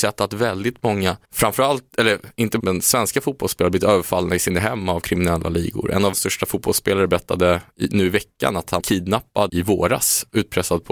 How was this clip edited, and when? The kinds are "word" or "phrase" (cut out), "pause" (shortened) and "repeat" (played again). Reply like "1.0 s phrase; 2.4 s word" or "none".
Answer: 1.2 s pause; 2.6 s word; 6.1 s word; 8.8 s word; 9.5 s word